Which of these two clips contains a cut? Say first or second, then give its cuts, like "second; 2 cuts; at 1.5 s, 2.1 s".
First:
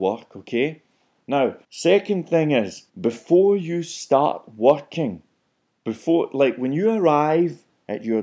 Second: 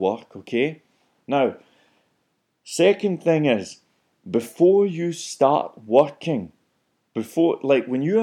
first; 2 cuts; at 1.6 s, 2.9 s